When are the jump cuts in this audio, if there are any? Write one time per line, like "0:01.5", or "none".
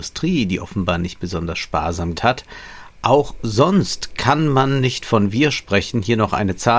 0:02.2